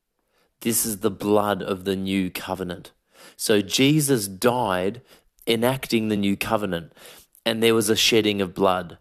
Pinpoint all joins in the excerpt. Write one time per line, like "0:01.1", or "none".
none